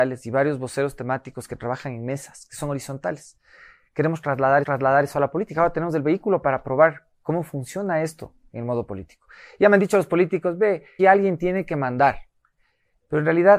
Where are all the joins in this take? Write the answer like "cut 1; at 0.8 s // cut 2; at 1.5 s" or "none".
cut 1; at 4.6 s // cut 2; at 11.0 s